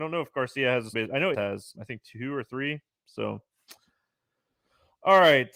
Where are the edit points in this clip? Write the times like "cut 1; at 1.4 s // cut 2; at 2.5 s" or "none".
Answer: cut 1; at 0.9 s // cut 2; at 1.3 s // cut 3; at 1.8 s